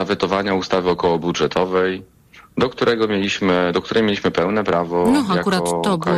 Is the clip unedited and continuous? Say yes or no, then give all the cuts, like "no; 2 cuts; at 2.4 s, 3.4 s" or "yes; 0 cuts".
yes; 0 cuts